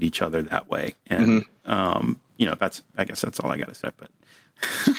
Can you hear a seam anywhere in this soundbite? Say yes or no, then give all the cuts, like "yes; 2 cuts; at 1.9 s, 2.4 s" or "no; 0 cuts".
yes; 3 cuts; at 1.0 s, 2.3 s, 3.8 s